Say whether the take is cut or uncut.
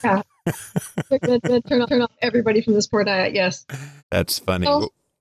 cut